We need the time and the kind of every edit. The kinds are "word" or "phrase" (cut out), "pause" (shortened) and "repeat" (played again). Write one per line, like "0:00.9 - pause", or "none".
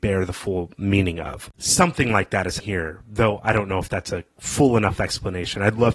0:01.5 - pause
0:02.6 - word
0:04.3 - pause